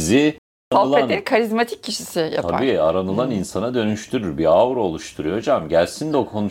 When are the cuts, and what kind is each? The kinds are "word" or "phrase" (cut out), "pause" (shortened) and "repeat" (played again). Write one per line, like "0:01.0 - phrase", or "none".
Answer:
none

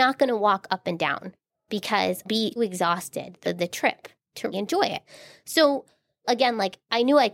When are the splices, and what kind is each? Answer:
0:02.2 - word
0:02.6 - word
0:03.4 - word
0:04.5 - word

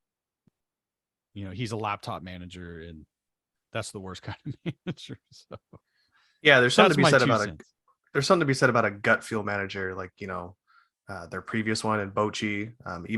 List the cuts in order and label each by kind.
none

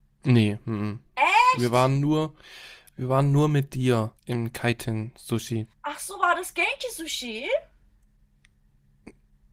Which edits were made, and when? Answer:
0:04.2 - pause
0:05.7 - pause

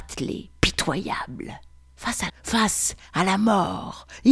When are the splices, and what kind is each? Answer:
0:01.7 - pause
0:02.3 - phrase

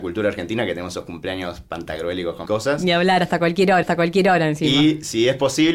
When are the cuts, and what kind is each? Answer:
0:02.5 - word
0:03.8 - repeat

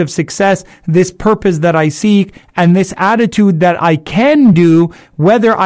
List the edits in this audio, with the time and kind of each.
none

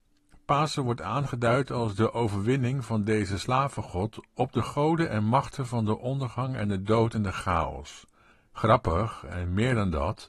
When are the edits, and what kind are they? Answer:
0:08.3 - pause

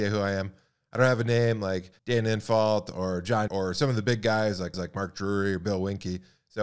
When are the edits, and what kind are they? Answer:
0:02.0 - pause
0:03.5 - word
0:04.7 - repeat

